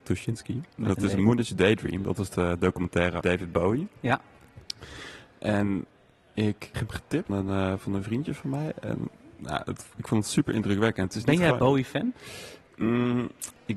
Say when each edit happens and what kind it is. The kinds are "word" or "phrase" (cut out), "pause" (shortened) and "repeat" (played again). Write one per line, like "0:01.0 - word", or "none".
0:03.2 - word
0:06.7 - word
0:07.3 - word